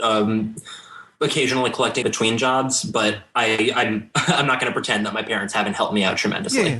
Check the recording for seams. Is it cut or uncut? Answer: cut